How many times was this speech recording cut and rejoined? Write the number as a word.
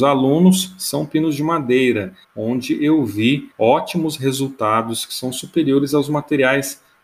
two